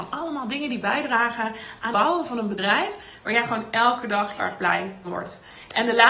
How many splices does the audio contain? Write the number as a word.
three